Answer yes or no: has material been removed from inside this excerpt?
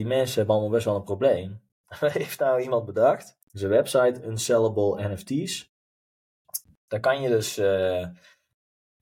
yes